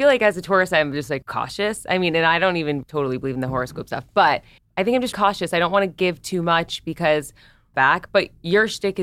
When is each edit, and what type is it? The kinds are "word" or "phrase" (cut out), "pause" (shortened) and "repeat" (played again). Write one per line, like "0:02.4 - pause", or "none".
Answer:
0:01.2 - word
0:02.8 - word
0:04.6 - pause
0:05.1 - word
0:07.7 - phrase